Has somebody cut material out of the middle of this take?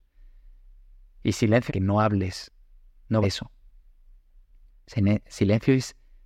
yes; 2 cuts; at 1.7 s, 3.2 s

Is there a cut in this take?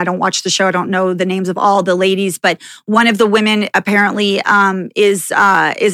no; 0 cuts

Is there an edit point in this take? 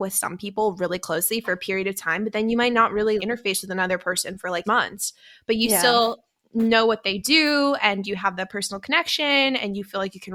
yes; 2 cuts; at 3.2 s, 4.6 s

